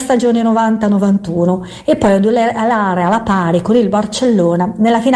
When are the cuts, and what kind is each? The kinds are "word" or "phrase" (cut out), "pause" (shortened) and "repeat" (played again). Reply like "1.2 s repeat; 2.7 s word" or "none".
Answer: none